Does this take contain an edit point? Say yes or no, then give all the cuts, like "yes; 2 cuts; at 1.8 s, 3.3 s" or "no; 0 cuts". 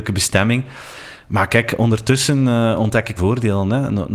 yes; 1 cut; at 3.2 s